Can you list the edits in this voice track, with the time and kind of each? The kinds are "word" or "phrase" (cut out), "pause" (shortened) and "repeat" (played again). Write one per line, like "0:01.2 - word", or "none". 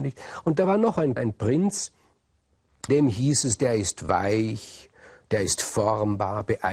0:01.2 - word
0:02.9 - word